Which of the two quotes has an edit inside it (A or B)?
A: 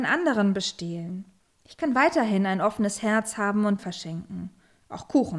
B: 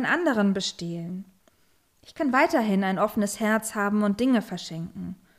A